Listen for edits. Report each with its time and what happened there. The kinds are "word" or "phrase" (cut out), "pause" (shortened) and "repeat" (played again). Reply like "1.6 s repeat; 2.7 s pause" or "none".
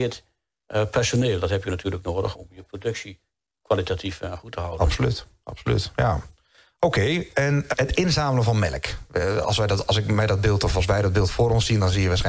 2.3 s word; 7.7 s word